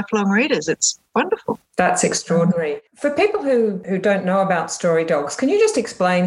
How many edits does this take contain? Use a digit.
1